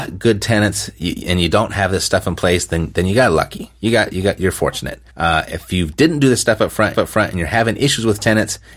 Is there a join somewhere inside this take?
yes; 2 cuts; at 5.1 s, 6.9 s

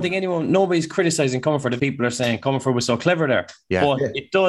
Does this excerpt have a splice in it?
yes; 1 cut; at 1.8 s

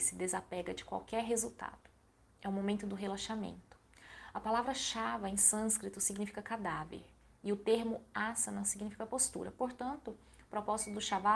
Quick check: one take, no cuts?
yes; 0 cuts

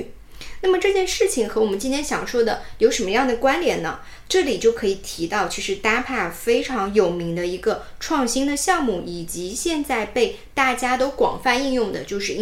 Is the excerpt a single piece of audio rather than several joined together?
yes; 0 cuts

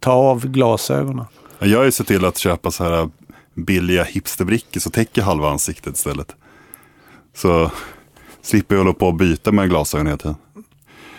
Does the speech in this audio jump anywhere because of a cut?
no; 0 cuts

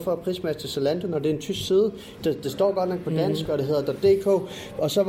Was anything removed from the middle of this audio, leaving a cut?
no; 0 cuts

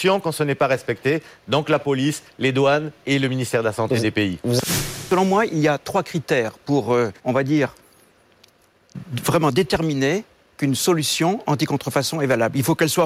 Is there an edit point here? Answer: yes; 1 cut; at 7.2 s

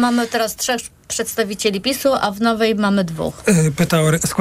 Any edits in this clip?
no; 0 cuts

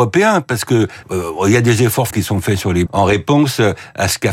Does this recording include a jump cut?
yes; 3 cuts; at 1.0 s, 2.1 s, 2.9 s

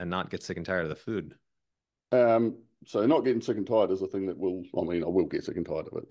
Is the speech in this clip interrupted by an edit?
no; 0 cuts

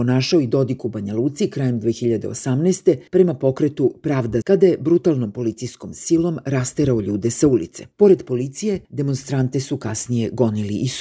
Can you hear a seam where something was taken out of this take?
yes; 4 cuts; at 3.1 s, 4.4 s, 7.9 s, 8.8 s

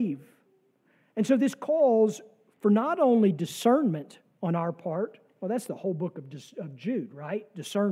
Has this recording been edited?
no; 0 cuts

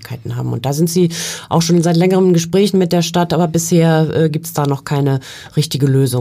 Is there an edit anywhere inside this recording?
no; 0 cuts

